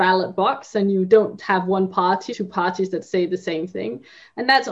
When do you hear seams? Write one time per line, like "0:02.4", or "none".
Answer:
0:01.4
0:02.3

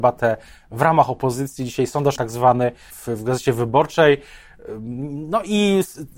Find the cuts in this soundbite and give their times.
0:02.2
0:02.9

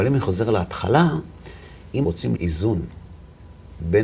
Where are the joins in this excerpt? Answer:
0:02.0
0:02.4

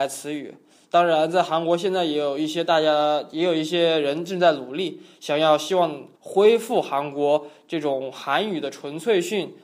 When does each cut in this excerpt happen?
0:06.2

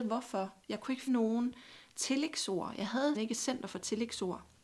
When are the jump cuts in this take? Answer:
0:01.1
0:03.1

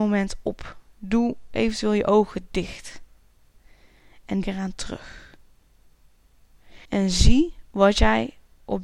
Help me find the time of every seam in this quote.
0:04.4
0:06.9

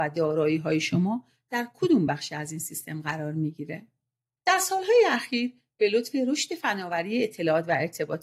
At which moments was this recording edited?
none

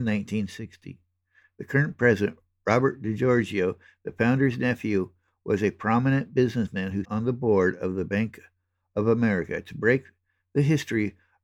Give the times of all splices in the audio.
0:07.0

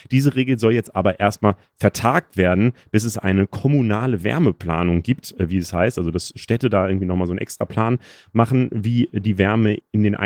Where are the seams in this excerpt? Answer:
none

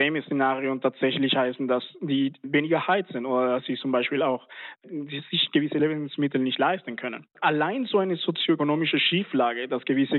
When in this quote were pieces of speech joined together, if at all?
0:07.3

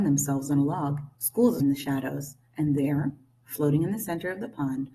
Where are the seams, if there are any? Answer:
0:01.1
0:01.6

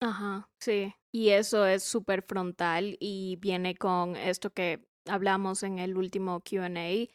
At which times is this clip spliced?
0:01.0

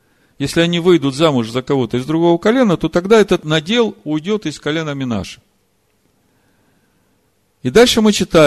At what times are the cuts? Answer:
none

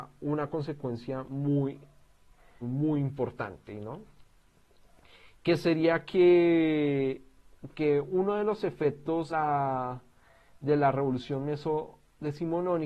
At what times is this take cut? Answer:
0:02.6
0:09.3

